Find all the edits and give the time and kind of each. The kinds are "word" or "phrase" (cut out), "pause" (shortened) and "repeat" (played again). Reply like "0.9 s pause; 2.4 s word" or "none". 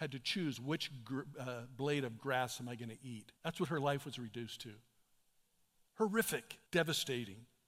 3.4 s pause; 6.7 s pause